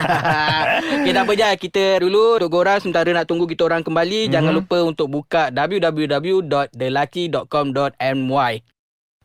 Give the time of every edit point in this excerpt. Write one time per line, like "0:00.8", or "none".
0:02.0
0:02.4